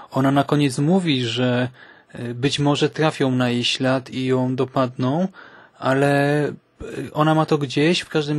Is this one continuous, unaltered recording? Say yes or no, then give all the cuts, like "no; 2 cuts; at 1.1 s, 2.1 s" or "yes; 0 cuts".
yes; 0 cuts